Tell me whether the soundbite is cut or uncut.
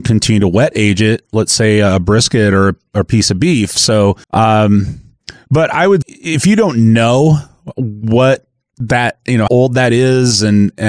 cut